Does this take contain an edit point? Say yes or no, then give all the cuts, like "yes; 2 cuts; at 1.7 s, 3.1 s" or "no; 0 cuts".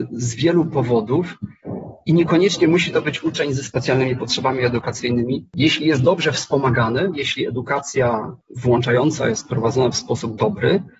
no; 0 cuts